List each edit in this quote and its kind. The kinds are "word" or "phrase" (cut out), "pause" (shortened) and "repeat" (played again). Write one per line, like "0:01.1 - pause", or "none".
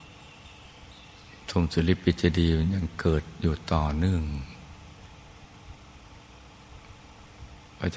none